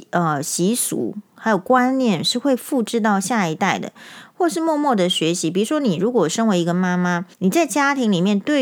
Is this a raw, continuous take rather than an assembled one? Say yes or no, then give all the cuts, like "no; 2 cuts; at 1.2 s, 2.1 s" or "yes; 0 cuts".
no; 1 cut; at 7.3 s